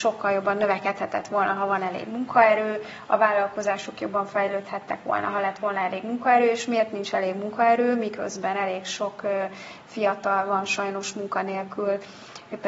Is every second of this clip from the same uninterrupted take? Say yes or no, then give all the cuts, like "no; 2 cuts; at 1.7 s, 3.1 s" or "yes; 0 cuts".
yes; 0 cuts